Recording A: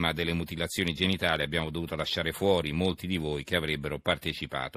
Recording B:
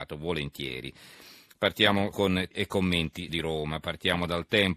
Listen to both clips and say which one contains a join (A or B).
B